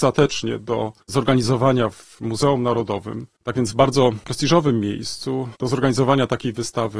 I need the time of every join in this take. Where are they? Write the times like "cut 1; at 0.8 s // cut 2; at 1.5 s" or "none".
cut 1; at 1.0 s